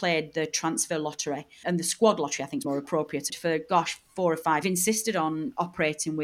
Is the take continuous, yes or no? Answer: no